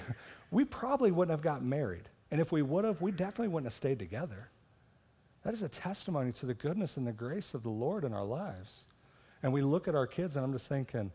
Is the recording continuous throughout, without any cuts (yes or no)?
yes